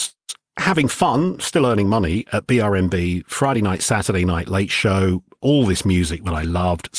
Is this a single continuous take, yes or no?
yes